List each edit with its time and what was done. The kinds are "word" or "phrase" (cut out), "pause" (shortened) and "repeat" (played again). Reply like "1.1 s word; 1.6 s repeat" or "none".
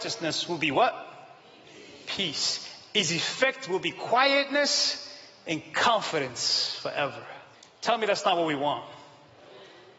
7.5 s pause